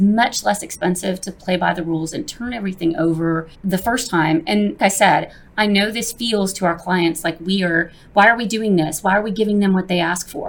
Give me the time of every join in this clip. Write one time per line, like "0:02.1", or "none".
0:03.5
0:04.8